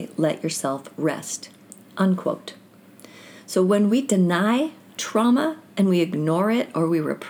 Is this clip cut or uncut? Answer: uncut